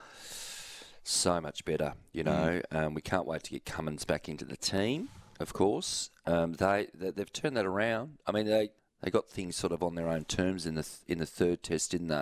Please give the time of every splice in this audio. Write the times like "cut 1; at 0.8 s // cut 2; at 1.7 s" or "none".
cut 1; at 8.8 s

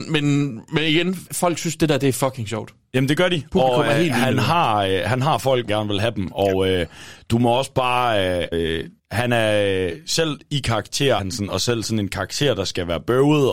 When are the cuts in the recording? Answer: cut 1; at 5.7 s // cut 2; at 8.5 s // cut 3; at 9.0 s // cut 4; at 11.2 s

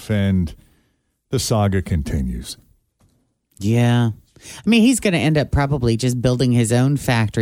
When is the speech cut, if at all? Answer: none

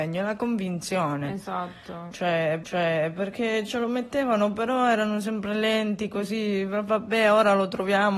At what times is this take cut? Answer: cut 1; at 2.6 s

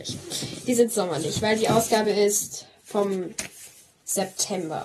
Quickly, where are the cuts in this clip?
none

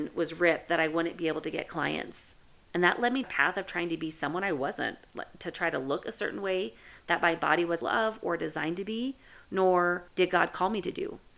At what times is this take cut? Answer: cut 1; at 3.2 s // cut 2; at 7.8 s // cut 3; at 10.1 s

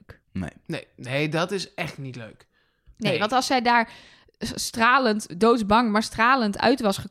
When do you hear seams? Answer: none

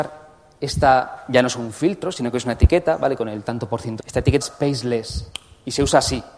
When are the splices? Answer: cut 1; at 4.0 s // cut 2; at 4.4 s

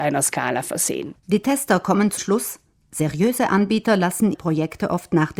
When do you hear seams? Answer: cut 1; at 2.2 s // cut 2; at 4.3 s

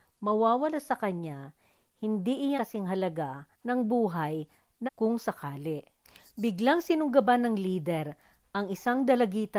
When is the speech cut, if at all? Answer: cut 1; at 2.6 s // cut 2; at 3.5 s // cut 3; at 4.9 s // cut 4; at 6.0 s

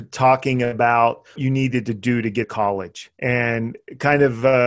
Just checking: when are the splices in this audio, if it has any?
cut 1; at 1.4 s // cut 2; at 2.4 s // cut 3; at 3.1 s

